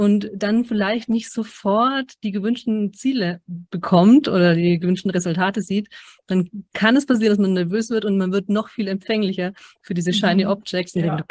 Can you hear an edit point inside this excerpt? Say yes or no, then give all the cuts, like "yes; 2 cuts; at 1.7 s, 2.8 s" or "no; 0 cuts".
no; 0 cuts